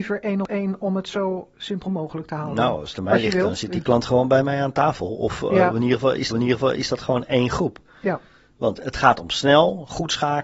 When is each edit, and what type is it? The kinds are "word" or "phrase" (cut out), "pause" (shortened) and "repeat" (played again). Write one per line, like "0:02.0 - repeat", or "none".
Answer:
0:01.5 - word
0:06.3 - repeat
0:08.8 - word